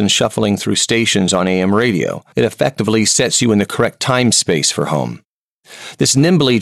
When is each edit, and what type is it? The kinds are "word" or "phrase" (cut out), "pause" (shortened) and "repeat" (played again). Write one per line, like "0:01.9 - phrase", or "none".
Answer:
0:02.3 - pause